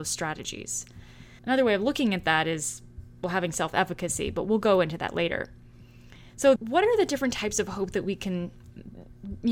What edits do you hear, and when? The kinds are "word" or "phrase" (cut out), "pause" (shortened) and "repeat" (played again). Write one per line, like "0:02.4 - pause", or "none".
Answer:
0:01.4 - pause
0:06.6 - word